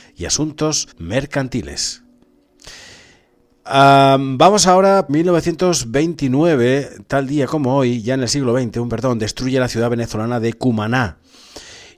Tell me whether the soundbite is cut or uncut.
cut